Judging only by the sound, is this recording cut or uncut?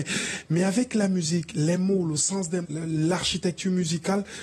cut